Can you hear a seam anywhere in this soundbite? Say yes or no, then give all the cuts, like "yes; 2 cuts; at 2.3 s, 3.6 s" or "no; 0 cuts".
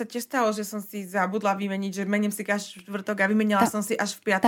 no; 0 cuts